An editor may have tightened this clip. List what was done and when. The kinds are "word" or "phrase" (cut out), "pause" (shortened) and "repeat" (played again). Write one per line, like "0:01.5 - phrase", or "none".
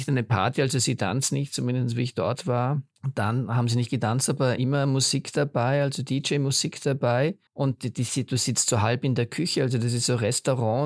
0:02.9 - pause
0:07.5 - pause